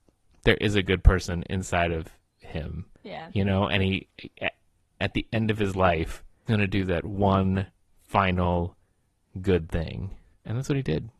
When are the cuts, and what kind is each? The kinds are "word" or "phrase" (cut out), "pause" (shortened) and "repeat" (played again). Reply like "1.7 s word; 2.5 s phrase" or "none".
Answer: 2.9 s pause; 5.0 s word; 6.5 s word